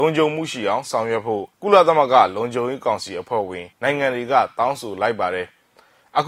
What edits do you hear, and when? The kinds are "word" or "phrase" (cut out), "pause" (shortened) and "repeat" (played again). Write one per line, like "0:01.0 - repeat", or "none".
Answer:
0:01.5 - pause
0:03.7 - pause